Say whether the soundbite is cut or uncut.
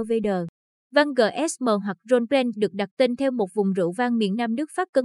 uncut